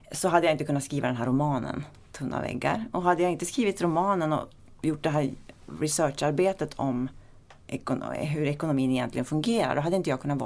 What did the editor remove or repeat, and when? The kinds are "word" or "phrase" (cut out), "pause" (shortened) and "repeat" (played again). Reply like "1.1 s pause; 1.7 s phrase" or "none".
7.6 s pause